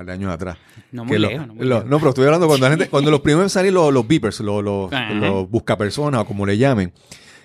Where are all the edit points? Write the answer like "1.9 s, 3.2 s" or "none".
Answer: none